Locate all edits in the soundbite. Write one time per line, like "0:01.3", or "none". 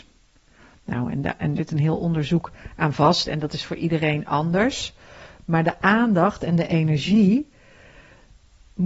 0:01.6